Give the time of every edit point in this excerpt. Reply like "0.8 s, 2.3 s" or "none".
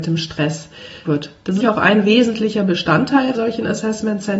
1.0 s, 1.6 s, 3.3 s

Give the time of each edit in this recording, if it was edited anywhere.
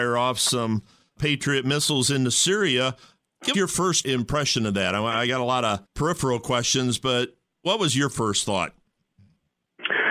3.5 s, 5.8 s

